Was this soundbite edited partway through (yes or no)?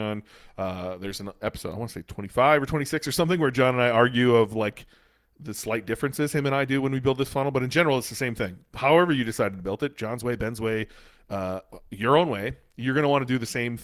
no